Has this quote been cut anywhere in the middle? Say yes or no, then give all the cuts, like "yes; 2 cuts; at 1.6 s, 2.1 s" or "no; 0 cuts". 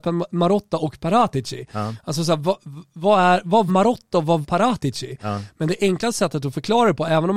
yes; 2 cuts; at 3.7 s, 4.4 s